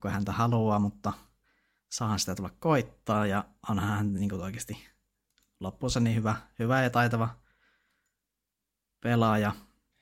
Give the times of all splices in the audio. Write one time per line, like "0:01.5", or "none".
none